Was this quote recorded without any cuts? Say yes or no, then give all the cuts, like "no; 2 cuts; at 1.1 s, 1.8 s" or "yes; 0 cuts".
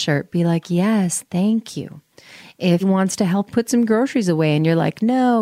no; 2 cuts; at 2.8 s, 3.5 s